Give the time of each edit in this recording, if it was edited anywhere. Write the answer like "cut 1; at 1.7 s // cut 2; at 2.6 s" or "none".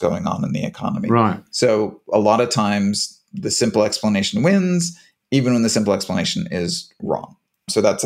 none